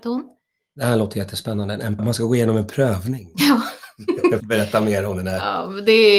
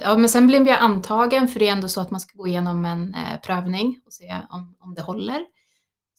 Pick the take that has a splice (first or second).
first